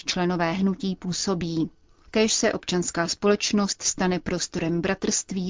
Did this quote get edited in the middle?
no; 0 cuts

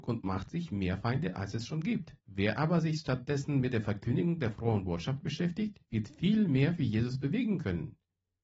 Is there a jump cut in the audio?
yes; 2 cuts; at 2.2 s, 5.8 s

